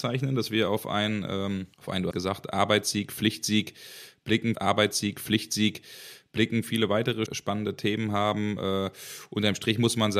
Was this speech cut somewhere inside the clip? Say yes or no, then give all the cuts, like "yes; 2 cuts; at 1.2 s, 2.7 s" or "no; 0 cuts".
yes; 4 cuts; at 1.7 s, 2.1 s, 4.5 s, 7.3 s